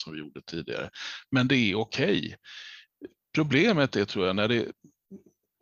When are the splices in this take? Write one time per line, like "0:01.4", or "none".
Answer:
none